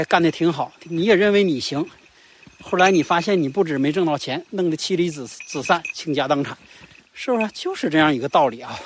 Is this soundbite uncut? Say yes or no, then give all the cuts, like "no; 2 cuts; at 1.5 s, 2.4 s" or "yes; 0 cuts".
yes; 0 cuts